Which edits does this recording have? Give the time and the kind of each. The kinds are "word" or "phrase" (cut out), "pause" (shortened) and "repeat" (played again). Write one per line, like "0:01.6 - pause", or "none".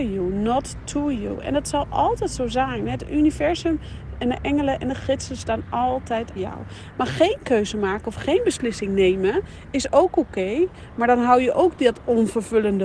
0:06.4 - word